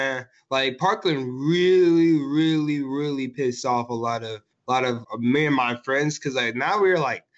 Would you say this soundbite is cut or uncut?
cut